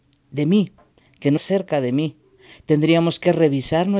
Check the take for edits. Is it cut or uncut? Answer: cut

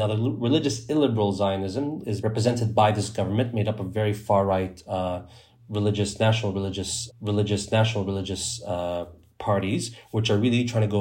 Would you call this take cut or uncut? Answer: cut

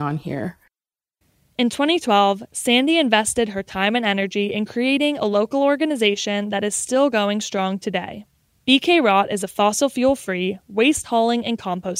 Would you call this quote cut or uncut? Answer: uncut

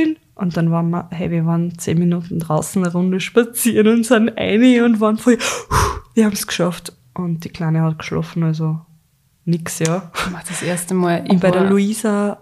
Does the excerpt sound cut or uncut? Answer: uncut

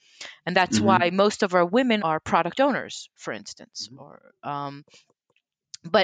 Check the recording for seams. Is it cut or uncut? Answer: cut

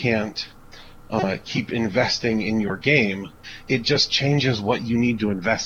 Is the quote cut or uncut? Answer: uncut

